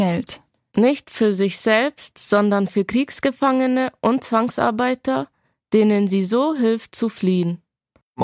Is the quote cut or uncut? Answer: uncut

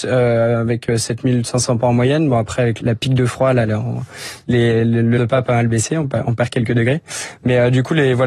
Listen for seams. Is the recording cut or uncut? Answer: cut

